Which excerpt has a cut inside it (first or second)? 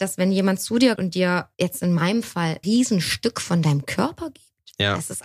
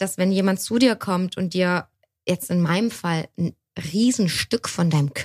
first